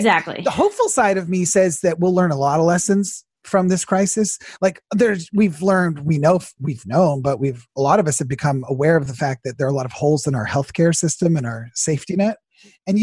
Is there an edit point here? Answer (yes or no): no